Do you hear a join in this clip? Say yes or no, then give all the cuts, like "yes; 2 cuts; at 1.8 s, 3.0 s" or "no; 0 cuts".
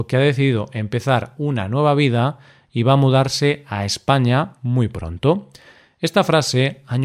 no; 0 cuts